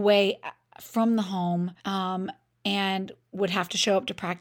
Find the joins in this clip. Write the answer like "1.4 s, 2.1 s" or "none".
1.8 s